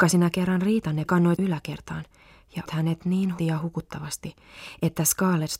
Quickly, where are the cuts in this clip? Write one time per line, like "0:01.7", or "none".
0:01.1
0:01.4
0:02.7
0:03.4